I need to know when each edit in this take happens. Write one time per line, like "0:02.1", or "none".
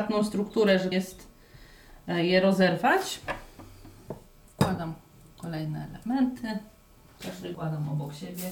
0:00.9
0:07.5